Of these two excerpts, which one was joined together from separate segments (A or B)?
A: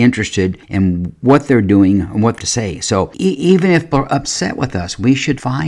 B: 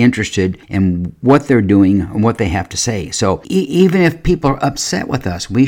A